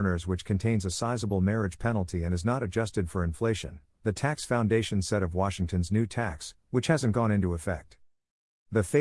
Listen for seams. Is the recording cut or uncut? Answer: uncut